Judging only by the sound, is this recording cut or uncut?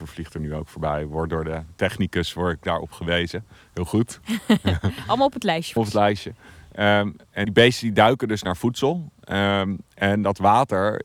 cut